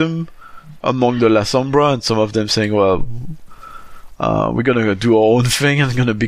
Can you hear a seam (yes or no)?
no